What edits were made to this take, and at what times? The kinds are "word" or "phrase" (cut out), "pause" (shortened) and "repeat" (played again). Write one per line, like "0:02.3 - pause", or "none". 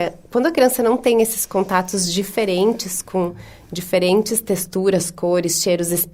none